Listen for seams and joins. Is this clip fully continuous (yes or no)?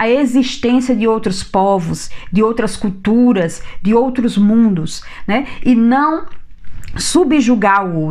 yes